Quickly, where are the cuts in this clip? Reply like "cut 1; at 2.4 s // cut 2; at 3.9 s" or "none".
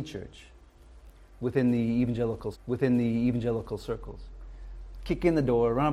cut 1; at 2.5 s